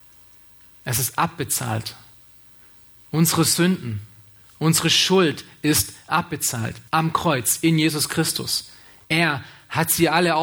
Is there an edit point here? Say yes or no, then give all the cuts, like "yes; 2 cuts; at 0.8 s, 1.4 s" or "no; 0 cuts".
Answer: yes; 1 cut; at 6.9 s